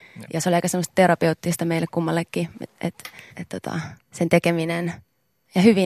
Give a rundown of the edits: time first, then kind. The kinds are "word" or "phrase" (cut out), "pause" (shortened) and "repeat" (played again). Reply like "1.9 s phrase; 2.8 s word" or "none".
3.3 s pause; 4.0 s pause